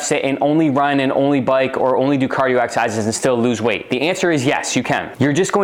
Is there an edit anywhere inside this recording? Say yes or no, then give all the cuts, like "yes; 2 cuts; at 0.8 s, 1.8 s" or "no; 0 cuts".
no; 0 cuts